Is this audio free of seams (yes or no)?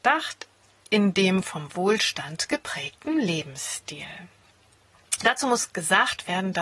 yes